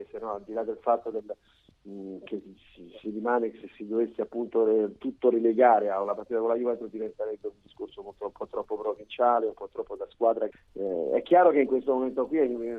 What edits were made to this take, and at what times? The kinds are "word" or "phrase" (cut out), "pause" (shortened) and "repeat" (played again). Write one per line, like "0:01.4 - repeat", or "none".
0:10.5 - phrase